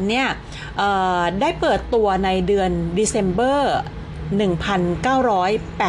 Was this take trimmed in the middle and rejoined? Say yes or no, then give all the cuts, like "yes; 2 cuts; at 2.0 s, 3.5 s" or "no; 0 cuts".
no; 0 cuts